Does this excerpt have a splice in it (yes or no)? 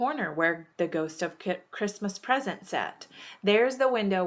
no